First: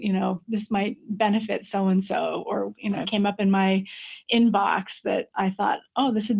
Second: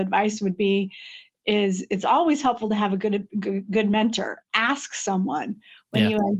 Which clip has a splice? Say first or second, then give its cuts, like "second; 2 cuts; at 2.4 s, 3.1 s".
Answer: first; 1 cut; at 3.0 s